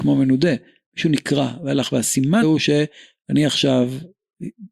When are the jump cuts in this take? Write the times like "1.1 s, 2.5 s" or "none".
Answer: 2.4 s